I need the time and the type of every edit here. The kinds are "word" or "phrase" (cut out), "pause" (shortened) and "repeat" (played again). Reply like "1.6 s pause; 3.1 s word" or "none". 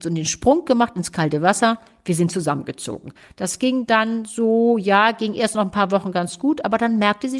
none